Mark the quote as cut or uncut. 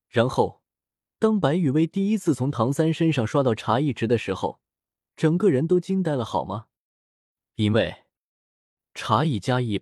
uncut